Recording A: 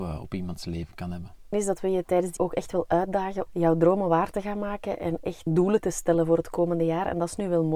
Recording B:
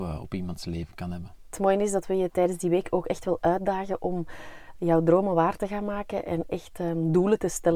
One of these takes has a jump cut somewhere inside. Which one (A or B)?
A